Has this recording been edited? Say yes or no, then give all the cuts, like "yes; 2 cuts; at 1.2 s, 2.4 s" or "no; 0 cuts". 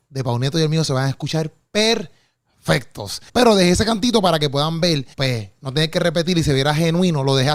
yes; 2 cuts; at 3.3 s, 5.1 s